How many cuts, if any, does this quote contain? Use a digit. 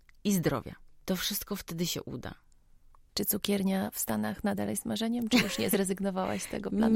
0